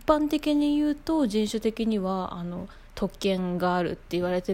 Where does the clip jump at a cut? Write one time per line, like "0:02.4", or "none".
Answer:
0:02.9